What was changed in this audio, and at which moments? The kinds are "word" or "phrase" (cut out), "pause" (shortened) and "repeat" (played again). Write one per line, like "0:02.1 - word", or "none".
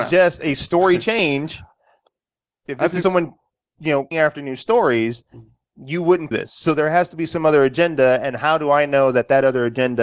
0:03.0 - word
0:04.1 - word
0:06.3 - word